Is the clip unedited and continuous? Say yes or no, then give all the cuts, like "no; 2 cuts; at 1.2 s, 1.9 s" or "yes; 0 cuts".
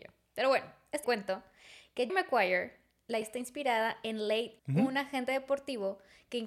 no; 4 cuts; at 1.0 s, 2.1 s, 3.2 s, 4.6 s